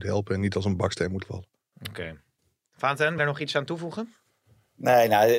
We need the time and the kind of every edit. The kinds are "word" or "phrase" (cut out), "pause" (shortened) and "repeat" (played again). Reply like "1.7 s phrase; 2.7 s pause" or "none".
1.2 s word; 3.2 s word

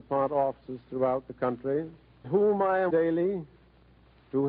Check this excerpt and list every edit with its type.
2.2 s word; 2.9 s word

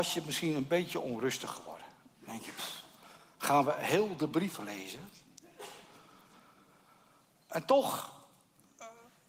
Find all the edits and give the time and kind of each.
none

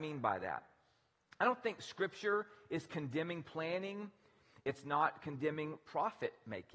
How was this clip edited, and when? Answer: none

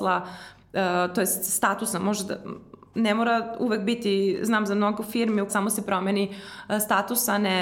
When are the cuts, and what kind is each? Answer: 5.5 s word

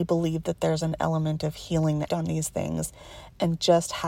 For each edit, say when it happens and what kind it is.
2.1 s phrase

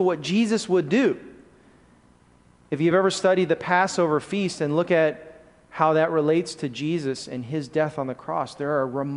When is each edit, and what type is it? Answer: none

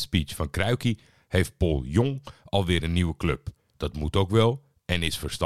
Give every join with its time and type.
none

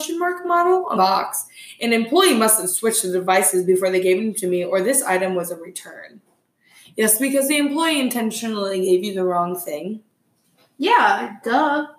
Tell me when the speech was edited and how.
1.0 s word

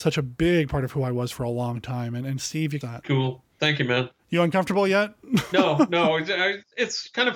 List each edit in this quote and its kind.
2.8 s phrase; 4.2 s pause

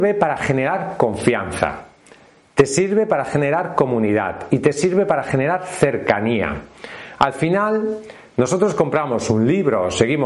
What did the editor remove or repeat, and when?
none

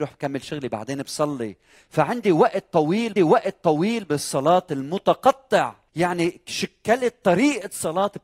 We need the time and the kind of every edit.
3.2 s repeat; 5.9 s pause

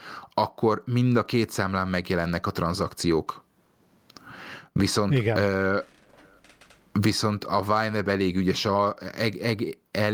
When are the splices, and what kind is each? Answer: none

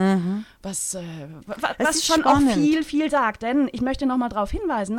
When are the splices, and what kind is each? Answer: none

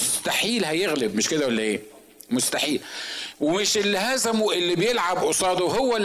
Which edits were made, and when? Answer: none

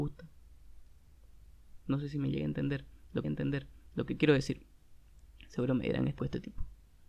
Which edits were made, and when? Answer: 1.8 s pause; 3.2 s repeat; 6.2 s word

